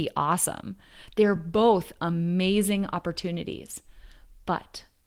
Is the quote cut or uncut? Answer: uncut